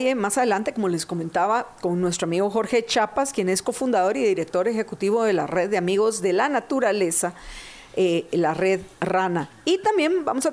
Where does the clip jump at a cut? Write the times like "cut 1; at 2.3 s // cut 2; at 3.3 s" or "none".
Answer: cut 1; at 8.9 s